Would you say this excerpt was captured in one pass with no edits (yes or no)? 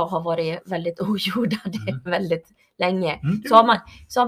yes